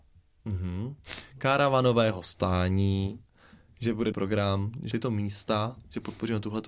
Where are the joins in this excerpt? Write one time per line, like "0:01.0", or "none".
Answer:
0:04.1
0:04.9